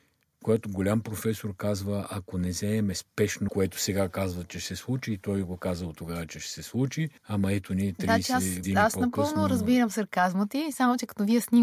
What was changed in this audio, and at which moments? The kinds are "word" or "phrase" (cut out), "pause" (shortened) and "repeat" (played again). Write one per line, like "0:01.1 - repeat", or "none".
0:03.5 - phrase
0:07.2 - pause
0:08.6 - word